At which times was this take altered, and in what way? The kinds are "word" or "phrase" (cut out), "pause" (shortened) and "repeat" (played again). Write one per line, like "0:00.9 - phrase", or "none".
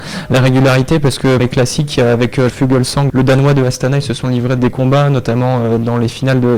0:01.4 - word
0:02.5 - word
0:03.1 - word
0:04.6 - word